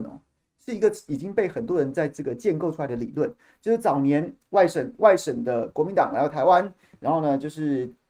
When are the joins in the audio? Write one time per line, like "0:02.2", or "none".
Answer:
none